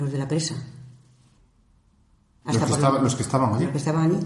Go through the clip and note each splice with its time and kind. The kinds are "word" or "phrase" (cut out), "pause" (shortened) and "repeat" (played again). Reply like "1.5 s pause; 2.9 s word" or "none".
none